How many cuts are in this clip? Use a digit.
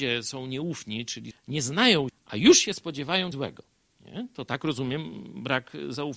3